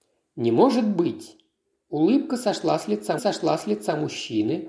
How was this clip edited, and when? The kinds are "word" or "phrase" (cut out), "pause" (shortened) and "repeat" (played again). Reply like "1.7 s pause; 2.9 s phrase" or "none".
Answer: 3.2 s repeat